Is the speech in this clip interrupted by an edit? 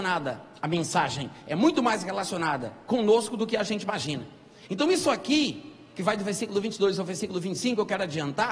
no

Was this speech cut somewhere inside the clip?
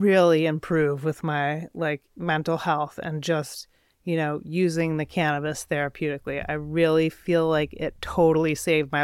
no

